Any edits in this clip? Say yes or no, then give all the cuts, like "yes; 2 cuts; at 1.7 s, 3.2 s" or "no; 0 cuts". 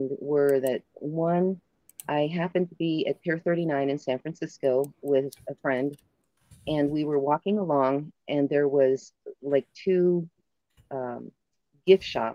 no; 0 cuts